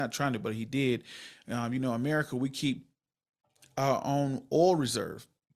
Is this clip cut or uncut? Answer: uncut